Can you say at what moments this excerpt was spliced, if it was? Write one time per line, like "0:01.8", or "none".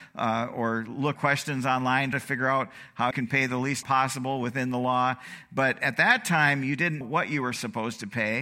0:01.1
0:02.1
0:03.1
0:03.8
0:07.0